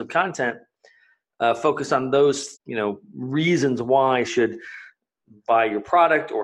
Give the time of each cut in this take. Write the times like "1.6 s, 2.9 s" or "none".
2.5 s, 4.2 s